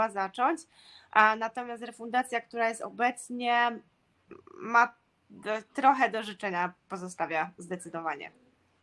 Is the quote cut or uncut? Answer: uncut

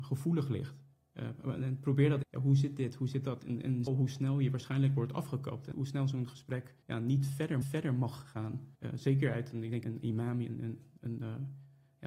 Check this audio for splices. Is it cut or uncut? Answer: cut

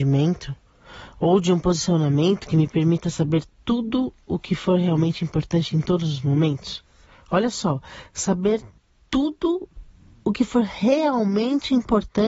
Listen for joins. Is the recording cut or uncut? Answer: uncut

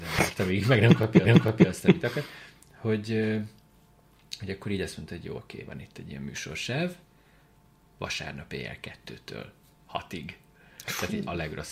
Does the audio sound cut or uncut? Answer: cut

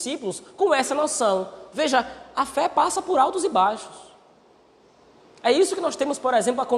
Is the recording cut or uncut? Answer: uncut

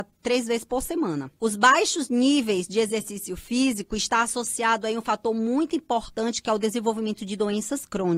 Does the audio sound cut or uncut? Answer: cut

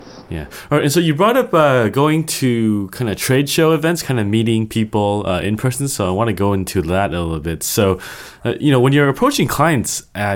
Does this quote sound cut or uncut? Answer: uncut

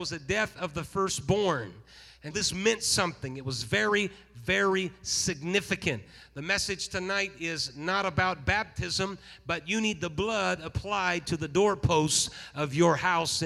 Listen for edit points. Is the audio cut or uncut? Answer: cut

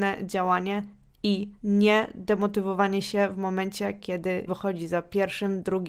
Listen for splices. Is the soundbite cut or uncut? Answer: cut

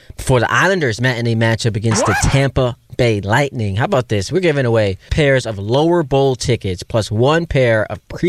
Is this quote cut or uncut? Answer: cut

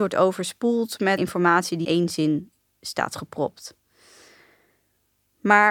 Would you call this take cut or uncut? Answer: cut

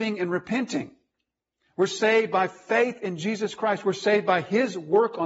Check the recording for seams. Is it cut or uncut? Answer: uncut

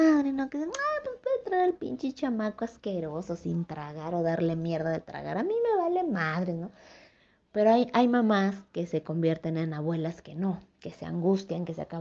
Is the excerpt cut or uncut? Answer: uncut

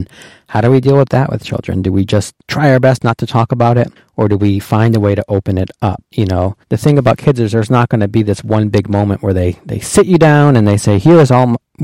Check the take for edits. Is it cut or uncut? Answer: cut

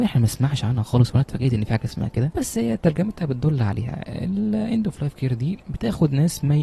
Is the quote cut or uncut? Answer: uncut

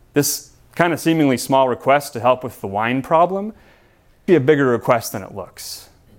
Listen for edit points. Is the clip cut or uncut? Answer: cut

